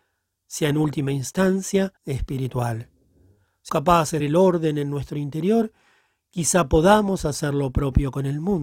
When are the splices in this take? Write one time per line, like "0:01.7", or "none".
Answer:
0:02.0
0:03.7
0:04.2